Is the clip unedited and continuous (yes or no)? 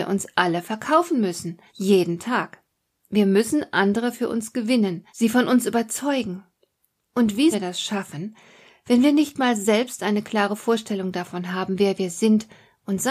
no